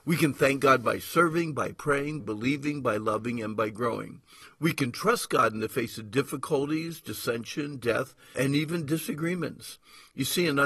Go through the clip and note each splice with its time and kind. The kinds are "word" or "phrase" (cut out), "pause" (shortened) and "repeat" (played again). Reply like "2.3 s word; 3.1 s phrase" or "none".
2.2 s word; 8.3 s word